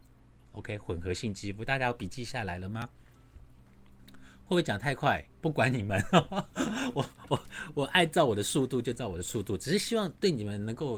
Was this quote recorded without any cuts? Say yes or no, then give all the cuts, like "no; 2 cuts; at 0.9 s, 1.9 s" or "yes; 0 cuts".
yes; 0 cuts